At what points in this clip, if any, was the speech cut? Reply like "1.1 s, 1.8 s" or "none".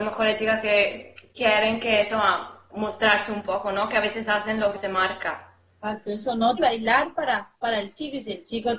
2.7 s, 4.8 s, 6.6 s, 7.6 s

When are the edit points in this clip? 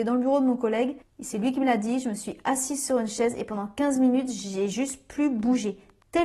none

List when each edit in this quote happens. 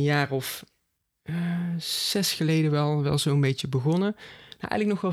none

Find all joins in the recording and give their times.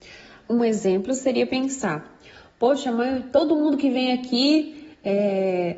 none

